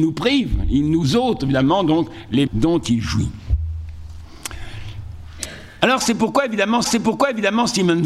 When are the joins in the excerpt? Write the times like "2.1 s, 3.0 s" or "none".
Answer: 2.5 s, 6.8 s